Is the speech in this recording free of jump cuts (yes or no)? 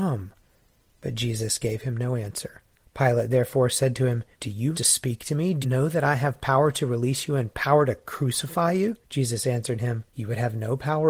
no